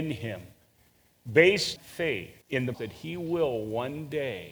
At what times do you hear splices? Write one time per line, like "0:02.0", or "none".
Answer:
0:01.8
0:02.4
0:02.7